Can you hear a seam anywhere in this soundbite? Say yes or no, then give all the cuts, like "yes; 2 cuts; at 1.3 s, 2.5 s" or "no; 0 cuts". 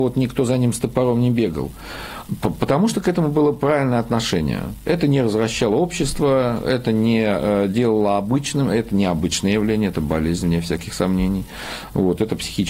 no; 0 cuts